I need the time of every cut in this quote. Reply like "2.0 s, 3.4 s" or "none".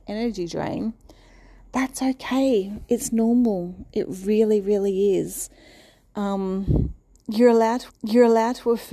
7.9 s

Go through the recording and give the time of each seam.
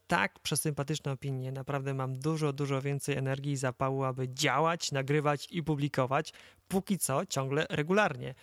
none

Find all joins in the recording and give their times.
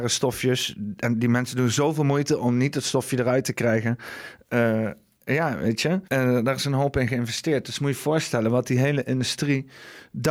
6.1 s

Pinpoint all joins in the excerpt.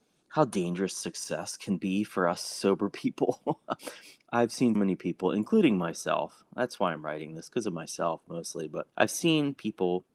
3.8 s, 4.7 s, 8.9 s

